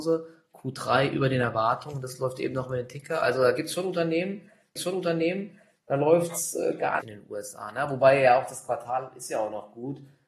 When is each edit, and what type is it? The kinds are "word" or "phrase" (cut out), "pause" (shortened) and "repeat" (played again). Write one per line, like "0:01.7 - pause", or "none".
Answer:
0:04.8 - repeat
0:07.0 - phrase